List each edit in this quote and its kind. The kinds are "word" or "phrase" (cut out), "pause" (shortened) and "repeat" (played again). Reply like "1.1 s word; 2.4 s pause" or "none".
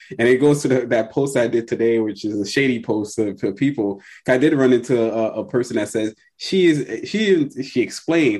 none